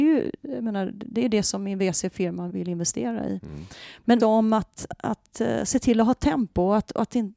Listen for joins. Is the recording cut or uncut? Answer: cut